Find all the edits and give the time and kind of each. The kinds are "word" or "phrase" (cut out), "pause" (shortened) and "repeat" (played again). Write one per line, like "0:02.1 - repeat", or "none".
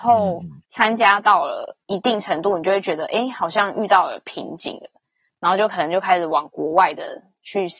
none